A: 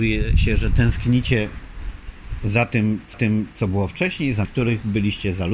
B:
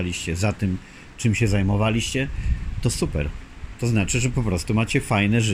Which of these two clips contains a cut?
A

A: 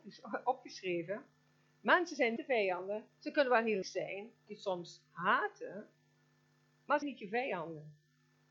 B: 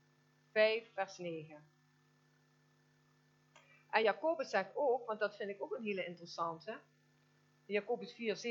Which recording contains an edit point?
A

